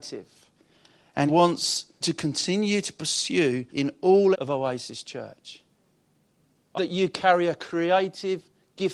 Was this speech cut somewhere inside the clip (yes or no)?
yes